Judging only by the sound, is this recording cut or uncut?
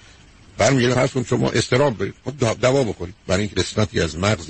cut